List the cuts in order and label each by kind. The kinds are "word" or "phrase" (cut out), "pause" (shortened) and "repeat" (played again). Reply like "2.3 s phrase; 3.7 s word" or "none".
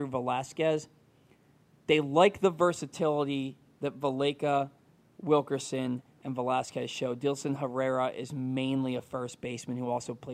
none